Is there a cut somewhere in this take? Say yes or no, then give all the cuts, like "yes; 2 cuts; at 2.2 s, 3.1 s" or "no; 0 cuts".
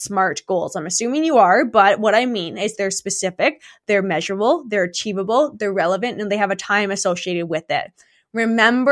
no; 0 cuts